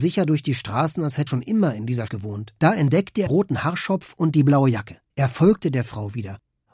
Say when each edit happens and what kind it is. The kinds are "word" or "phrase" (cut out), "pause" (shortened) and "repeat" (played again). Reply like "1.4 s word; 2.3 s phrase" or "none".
1.3 s word; 2.1 s word; 2.6 s pause; 3.3 s word; 5.1 s pause